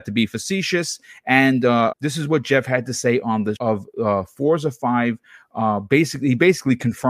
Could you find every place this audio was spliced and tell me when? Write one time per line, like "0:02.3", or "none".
0:01.9
0:03.6